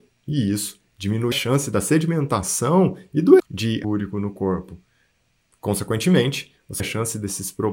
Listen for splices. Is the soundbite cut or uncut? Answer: cut